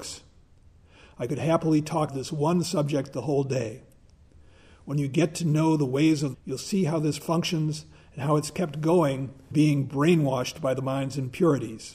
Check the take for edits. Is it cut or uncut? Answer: cut